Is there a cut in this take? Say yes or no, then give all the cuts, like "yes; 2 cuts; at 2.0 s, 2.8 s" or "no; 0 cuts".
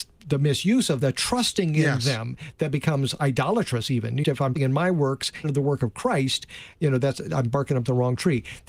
yes; 4 cuts; at 1.0 s, 4.2 s, 4.6 s, 5.4 s